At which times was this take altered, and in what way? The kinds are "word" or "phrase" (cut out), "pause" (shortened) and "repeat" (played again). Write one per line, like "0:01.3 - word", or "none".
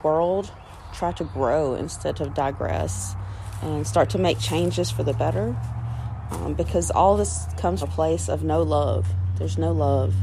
0:07.8 - word